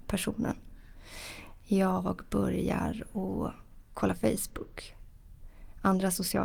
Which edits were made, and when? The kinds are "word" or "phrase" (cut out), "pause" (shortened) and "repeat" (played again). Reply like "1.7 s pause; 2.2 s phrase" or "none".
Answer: 3.8 s word